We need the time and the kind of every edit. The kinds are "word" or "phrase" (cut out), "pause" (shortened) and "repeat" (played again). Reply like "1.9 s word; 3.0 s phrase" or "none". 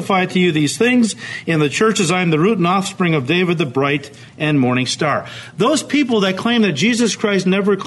4.3 s pause